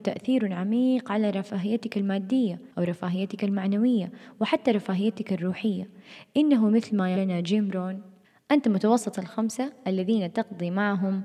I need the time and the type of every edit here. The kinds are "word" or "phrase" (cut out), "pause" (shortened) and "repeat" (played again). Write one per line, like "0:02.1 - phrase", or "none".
0:02.7 - pause
0:07.1 - word
0:08.2 - pause
0:09.1 - word